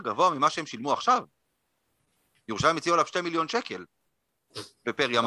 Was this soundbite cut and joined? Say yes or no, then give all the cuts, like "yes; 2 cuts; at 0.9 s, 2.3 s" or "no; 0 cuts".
no; 0 cuts